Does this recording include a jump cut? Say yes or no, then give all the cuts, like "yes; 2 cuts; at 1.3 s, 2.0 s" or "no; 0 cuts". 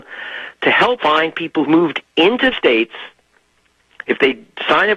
yes; 3 cuts; at 1.0 s, 1.6 s, 2.5 s